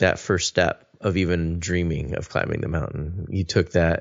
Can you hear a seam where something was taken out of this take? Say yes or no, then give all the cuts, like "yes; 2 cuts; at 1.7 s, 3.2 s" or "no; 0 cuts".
no; 0 cuts